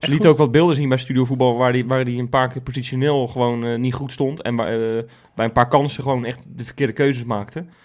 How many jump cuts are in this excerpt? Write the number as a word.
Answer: zero